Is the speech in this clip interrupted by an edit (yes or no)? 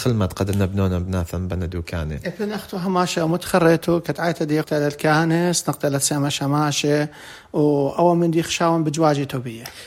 yes